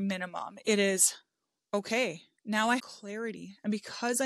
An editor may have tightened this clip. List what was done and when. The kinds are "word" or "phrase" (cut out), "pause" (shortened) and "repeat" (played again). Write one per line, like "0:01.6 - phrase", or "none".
0:02.8 - word